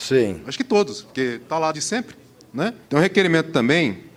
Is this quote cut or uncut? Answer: cut